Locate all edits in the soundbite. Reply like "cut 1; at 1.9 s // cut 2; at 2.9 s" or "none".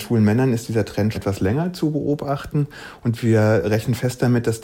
cut 1; at 1.1 s

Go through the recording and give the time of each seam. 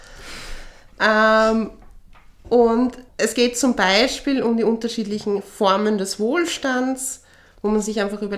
cut 1; at 3.1 s

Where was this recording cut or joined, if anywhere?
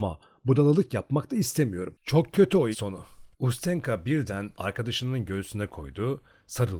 cut 1; at 2.7 s // cut 2; at 3.3 s // cut 3; at 4.5 s

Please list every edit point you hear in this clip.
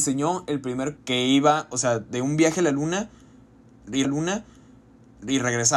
cut 1; at 1.0 s // cut 2; at 4.0 s

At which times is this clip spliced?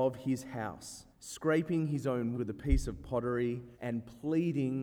cut 1; at 1.1 s // cut 2; at 2.3 s // cut 3; at 3.7 s

